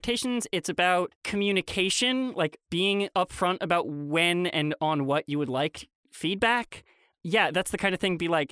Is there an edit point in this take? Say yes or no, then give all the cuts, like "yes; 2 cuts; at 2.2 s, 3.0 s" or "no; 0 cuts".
no; 0 cuts